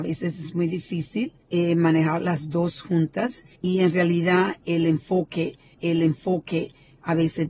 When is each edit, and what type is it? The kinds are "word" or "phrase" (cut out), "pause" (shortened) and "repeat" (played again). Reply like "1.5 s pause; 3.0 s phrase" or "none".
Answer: 1.4 s pause; 3.5 s pause; 5.7 s repeat